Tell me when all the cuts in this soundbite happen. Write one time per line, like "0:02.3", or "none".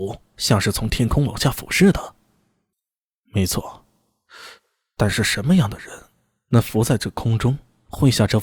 none